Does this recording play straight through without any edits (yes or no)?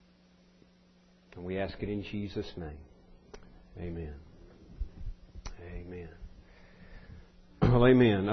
yes